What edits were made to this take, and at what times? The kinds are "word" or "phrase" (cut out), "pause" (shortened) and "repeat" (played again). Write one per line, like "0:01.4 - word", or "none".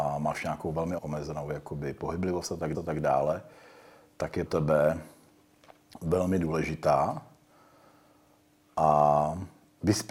0:01.0 - word
0:02.7 - repeat
0:04.5 - word